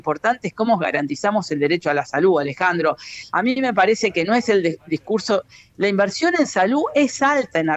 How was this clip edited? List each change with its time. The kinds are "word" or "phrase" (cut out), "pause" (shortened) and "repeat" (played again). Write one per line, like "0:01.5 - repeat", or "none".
none